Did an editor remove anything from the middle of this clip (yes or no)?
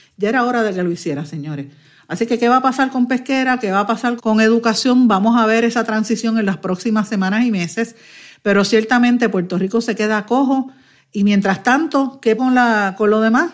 yes